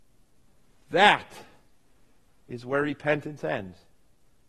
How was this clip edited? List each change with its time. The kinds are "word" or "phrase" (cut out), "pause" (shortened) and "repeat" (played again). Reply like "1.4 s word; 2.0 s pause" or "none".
none